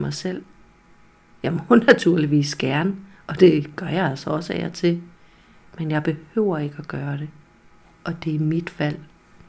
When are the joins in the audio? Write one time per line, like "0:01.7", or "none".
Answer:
none

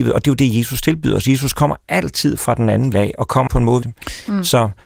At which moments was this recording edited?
0:02.9
0:03.5
0:03.8

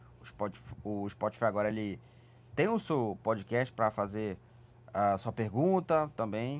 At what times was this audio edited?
none

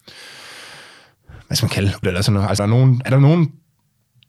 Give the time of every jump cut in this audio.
0:02.0
0:02.6
0:03.0

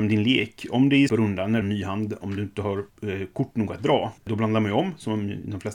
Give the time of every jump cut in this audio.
0:01.1
0:01.6
0:02.9
0:04.2

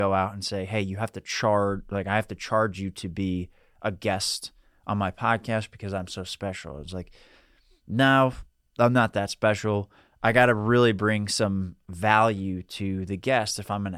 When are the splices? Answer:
none

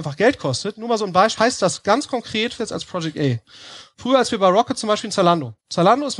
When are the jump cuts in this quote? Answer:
0:01.4
0:02.6

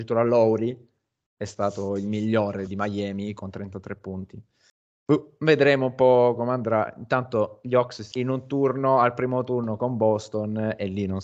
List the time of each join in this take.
0:02.7
0:08.1

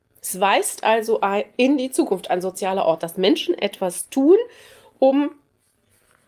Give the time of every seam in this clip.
none

